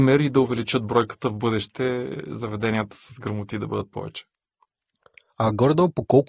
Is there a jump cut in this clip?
no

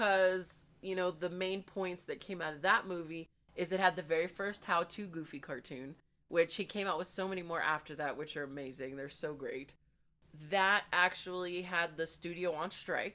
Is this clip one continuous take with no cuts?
yes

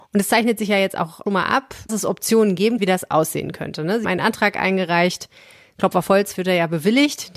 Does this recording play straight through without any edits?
no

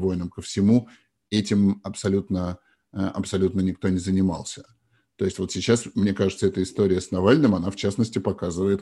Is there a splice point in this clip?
no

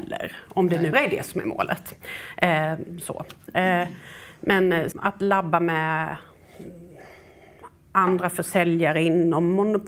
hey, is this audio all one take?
no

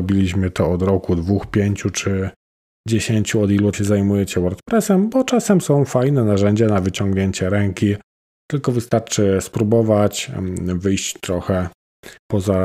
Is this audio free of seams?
no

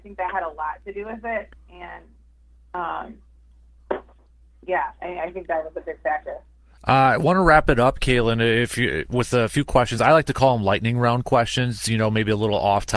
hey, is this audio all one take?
yes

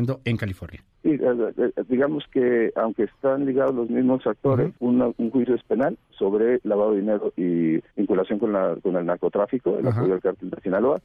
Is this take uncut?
no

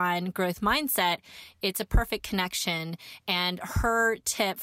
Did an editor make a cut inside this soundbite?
no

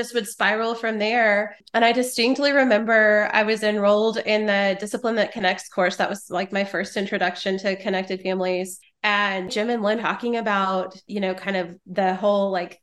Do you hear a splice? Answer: yes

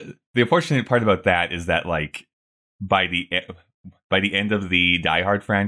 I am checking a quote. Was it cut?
no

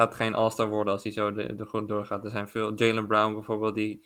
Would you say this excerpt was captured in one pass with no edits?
yes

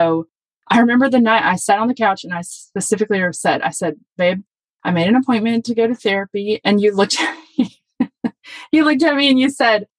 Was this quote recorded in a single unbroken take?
yes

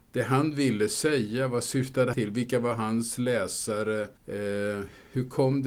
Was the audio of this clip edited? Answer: yes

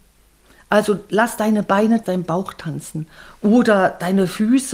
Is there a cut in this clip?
yes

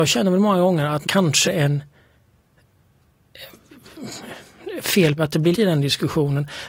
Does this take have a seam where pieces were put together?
yes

